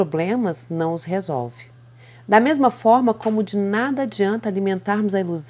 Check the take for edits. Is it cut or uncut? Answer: uncut